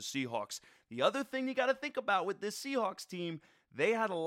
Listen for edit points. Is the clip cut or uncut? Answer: uncut